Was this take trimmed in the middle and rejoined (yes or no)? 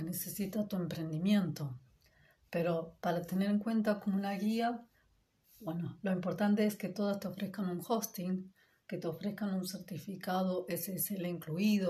no